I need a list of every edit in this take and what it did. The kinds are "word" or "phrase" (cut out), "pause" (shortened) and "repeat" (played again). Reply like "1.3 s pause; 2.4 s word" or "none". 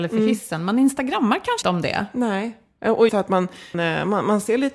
1.6 s word; 3.1 s word; 3.7 s word